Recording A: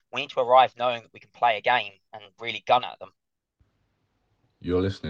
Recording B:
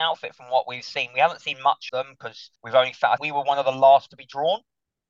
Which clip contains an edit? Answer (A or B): B